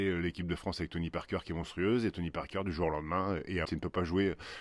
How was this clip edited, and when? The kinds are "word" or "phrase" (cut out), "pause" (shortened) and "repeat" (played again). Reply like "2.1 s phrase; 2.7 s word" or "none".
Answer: 3.6 s word

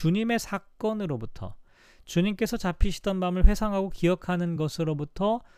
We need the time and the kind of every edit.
none

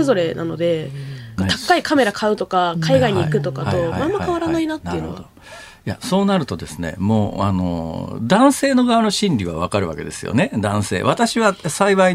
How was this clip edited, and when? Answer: 1.4 s phrase

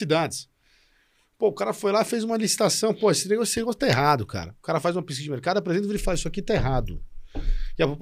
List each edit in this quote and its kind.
none

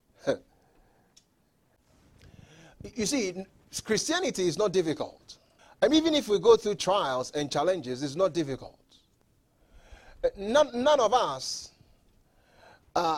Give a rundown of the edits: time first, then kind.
2.9 s word; 5.6 s pause; 6.8 s phrase

